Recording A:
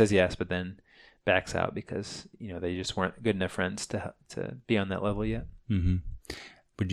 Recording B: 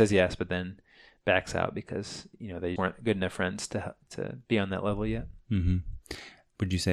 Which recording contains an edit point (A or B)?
B